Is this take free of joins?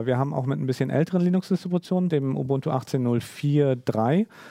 no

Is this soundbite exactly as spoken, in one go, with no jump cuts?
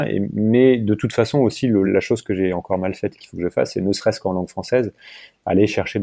no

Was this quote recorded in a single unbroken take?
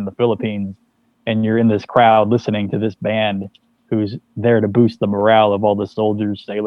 yes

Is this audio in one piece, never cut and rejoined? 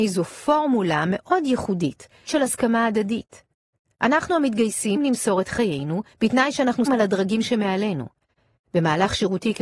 no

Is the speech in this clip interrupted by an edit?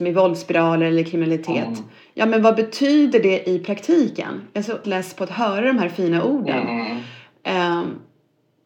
yes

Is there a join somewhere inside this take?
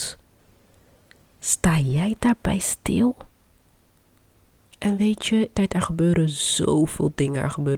yes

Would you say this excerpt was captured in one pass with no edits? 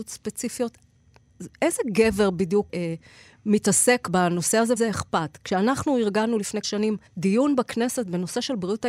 no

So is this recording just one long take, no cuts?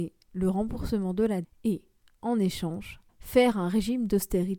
no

